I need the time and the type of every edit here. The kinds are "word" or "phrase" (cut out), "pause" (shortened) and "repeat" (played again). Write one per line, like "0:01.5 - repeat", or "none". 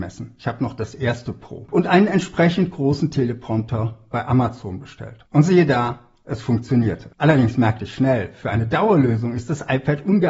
none